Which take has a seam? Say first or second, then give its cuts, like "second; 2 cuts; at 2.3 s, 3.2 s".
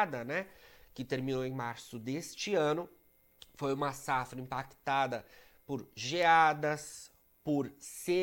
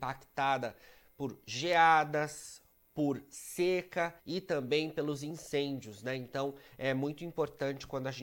second; 1 cut; at 4.2 s